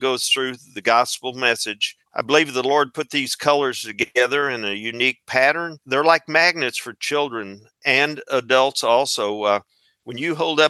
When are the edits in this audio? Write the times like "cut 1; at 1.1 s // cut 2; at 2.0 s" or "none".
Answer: cut 1; at 2.0 s // cut 2; at 5.8 s